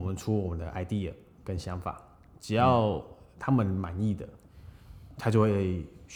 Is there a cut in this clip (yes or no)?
no